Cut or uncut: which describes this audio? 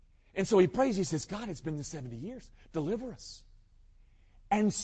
uncut